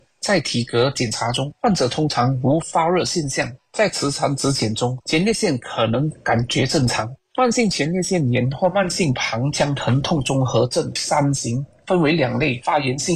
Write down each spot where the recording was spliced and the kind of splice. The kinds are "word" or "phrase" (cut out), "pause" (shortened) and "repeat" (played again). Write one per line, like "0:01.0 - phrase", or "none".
0:11.0 - word